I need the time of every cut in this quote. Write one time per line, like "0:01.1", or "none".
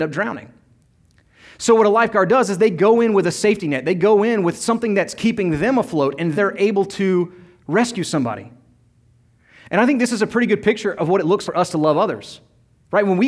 0:06.4
0:11.5